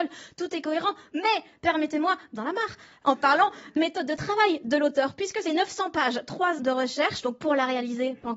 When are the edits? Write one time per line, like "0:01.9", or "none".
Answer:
0:02.3
0:03.8
0:05.4
0:06.6